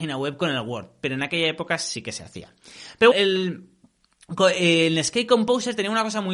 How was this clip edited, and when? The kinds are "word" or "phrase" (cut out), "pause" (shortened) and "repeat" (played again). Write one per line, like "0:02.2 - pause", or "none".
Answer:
0:03.1 - word